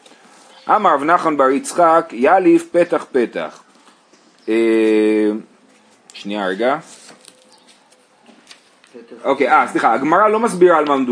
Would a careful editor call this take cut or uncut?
uncut